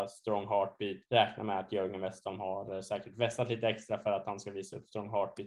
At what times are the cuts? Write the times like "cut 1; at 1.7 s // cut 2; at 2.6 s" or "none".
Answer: cut 1; at 1.0 s